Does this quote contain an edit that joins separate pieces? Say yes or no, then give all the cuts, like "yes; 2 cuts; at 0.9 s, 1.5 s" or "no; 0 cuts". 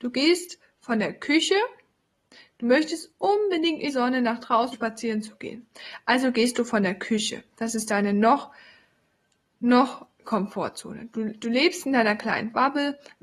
yes; 2 cuts; at 3.9 s, 4.7 s